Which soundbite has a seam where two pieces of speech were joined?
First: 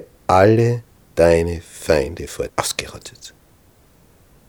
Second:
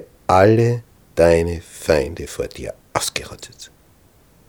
first; 1 cut; at 2.5 s

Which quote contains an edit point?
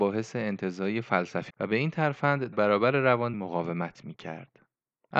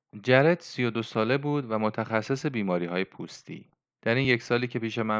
first; 3 cuts; at 1.5 s, 2.5 s, 3.3 s

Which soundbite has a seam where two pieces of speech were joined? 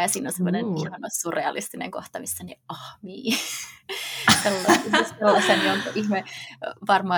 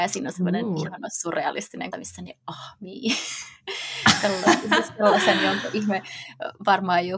second; 1 cut; at 1.9 s

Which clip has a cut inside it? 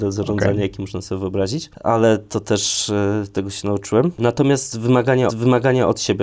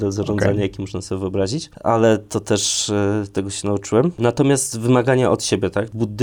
first; 1 cut; at 5.3 s

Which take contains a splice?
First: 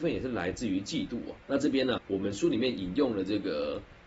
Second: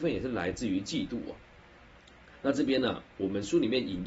first; 2 cuts; at 1.4 s, 2.0 s

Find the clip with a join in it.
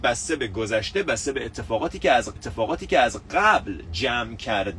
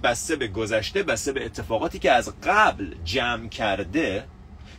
first; 1 cut; at 2.4 s

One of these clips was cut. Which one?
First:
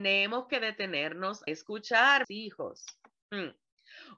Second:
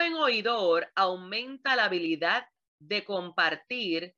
first; 2 cuts; at 1.5 s, 2.2 s

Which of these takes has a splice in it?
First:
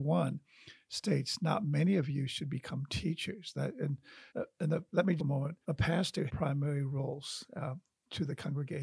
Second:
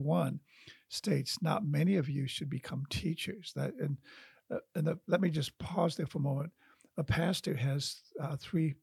first; 4 cuts; at 4.3 s, 5.2 s, 5.6 s, 6.3 s

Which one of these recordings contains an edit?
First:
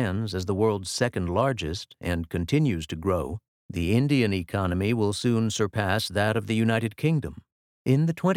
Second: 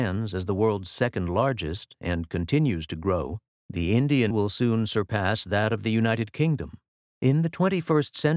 second; 1 cut; at 4.3 s

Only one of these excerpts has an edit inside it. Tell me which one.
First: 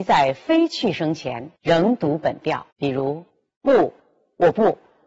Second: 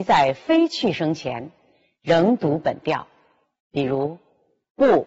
first; 4 cuts; at 1.6 s, 2.7 s, 3.3 s, 4.0 s

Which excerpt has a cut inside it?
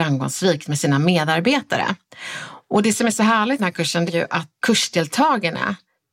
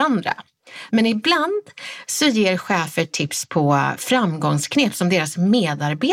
first; 3 cuts; at 3.6 s, 4.1 s, 4.6 s

